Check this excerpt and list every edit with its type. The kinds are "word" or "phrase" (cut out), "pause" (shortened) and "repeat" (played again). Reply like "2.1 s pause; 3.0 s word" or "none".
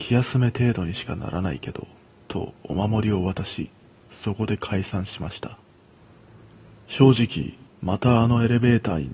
7.7 s pause